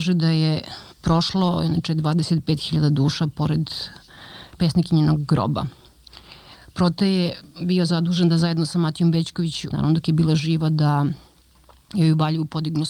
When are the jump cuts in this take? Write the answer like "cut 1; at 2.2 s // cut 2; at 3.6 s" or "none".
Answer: cut 1; at 0.9 s // cut 2; at 4.6 s // cut 3; at 9.7 s